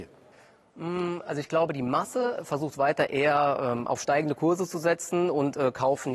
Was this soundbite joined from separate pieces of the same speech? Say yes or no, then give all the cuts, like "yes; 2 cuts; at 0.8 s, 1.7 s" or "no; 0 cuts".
no; 0 cuts